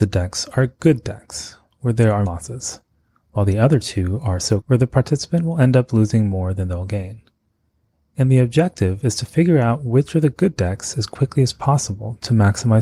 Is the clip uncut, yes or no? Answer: no